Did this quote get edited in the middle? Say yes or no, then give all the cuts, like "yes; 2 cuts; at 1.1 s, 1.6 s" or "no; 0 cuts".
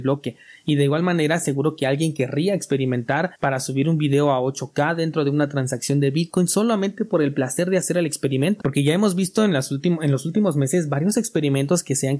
yes; 1 cut; at 3.4 s